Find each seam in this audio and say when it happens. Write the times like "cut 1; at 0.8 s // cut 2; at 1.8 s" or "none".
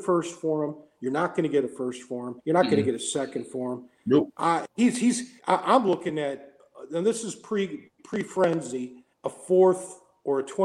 cut 1; at 2.4 s // cut 2; at 5.4 s // cut 3; at 8.0 s // cut 4; at 9.1 s